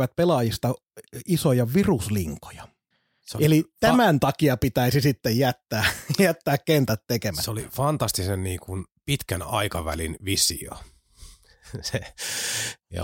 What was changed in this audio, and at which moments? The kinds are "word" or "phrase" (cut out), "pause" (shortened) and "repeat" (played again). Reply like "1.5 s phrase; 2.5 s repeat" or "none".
2.9 s pause